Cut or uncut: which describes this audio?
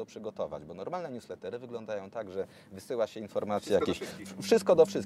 uncut